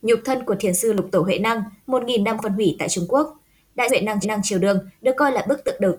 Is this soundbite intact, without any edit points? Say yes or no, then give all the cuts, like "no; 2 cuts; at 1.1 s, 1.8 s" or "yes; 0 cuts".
no; 3 cuts; at 2.4 s, 3.9 s, 4.2 s